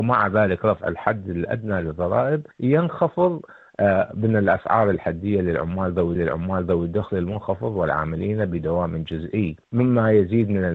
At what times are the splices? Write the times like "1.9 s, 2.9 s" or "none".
2.5 s, 6.2 s, 9.6 s